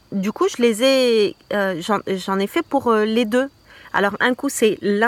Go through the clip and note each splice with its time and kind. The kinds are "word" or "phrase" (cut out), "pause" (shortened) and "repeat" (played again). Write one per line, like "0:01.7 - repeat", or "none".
none